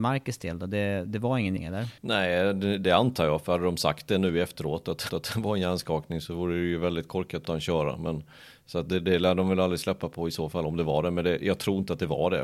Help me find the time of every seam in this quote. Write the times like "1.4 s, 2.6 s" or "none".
1.6 s, 2.0 s, 5.1 s, 7.4 s